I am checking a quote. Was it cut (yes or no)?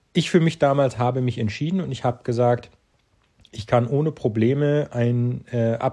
no